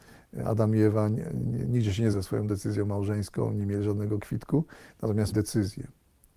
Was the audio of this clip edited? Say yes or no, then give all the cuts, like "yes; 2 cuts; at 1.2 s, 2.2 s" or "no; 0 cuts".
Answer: yes; 2 cuts; at 2.1 s, 5.3 s